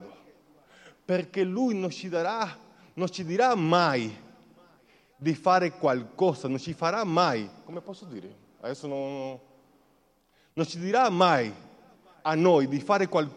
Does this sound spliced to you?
no; 0 cuts

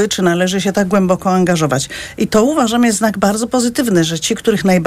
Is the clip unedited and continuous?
yes; 0 cuts

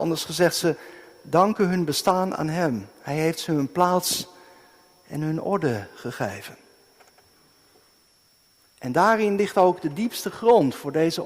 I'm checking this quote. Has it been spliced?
no; 0 cuts

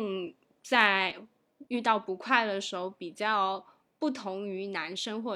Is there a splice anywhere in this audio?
yes; 1 cut; at 1.7 s

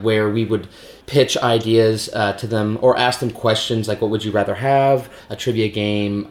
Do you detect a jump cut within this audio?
yes; 1 cut; at 1.0 s

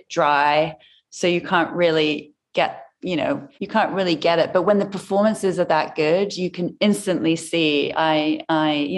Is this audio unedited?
no; 1 cut; at 3.5 s

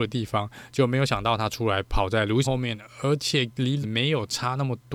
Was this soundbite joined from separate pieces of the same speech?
yes; 2 cuts; at 2.4 s, 3.8 s

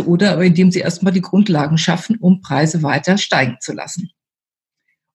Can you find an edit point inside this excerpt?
no; 0 cuts

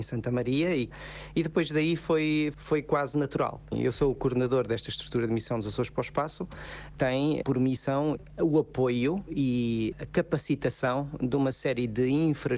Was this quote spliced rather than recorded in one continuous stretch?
no; 0 cuts

